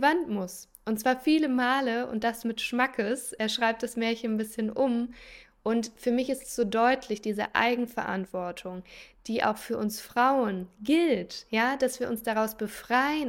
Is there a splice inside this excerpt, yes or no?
no